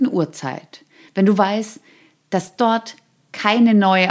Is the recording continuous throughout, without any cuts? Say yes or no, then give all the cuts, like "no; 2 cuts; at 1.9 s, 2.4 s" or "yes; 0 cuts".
yes; 0 cuts